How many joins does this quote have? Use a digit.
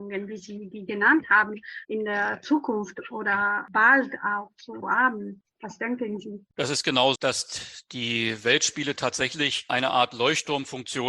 4